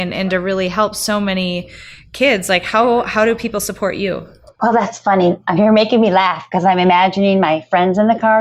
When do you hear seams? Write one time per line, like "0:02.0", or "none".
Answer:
none